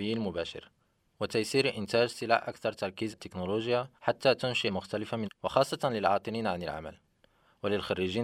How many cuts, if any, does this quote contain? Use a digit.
4